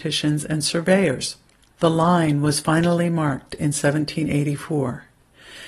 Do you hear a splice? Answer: no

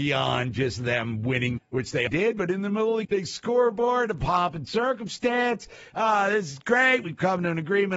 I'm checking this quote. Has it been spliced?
yes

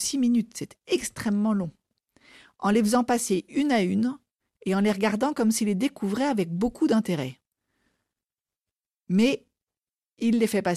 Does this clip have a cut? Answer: no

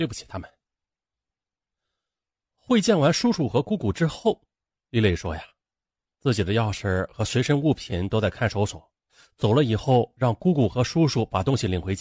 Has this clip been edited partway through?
no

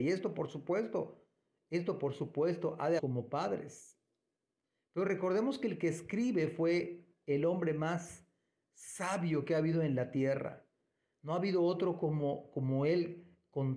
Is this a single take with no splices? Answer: no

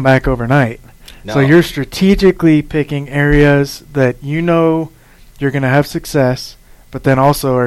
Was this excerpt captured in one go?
yes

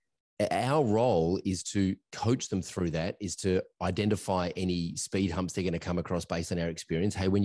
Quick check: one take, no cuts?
yes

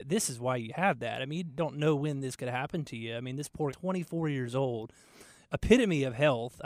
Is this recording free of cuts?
no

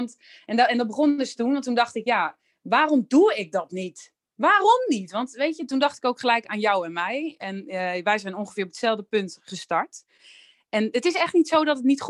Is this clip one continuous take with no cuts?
yes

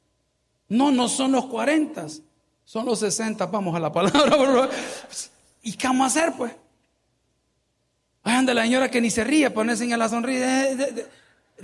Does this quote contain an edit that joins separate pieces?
no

